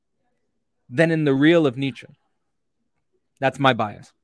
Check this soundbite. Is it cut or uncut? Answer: uncut